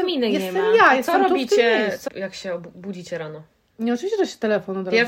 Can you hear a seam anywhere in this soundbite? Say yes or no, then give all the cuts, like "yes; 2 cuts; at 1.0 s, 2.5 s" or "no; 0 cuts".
yes; 1 cut; at 2.1 s